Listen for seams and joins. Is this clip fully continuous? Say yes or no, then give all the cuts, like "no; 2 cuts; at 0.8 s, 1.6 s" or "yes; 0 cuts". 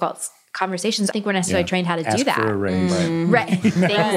no; 1 cut; at 1.1 s